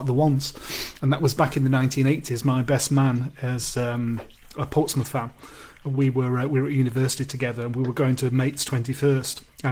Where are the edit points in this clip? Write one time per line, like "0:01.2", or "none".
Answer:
none